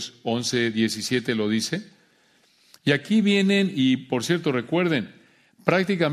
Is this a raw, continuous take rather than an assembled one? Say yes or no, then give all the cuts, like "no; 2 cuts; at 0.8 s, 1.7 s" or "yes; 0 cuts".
yes; 0 cuts